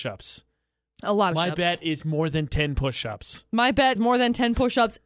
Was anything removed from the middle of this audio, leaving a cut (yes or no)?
yes